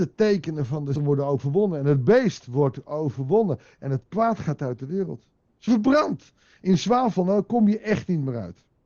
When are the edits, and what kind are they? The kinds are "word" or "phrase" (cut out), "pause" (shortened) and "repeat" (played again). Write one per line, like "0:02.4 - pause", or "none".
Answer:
0:01.0 - word
0:05.7 - word